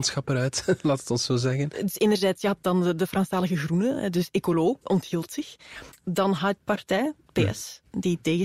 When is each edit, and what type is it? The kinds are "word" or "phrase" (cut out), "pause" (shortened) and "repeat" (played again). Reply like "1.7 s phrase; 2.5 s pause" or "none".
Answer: 6.6 s phrase